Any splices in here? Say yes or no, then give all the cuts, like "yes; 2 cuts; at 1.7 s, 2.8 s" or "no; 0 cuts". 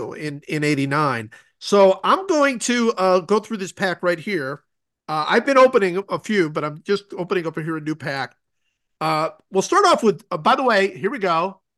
no; 0 cuts